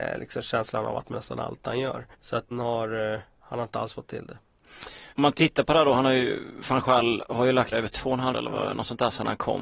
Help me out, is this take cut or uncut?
cut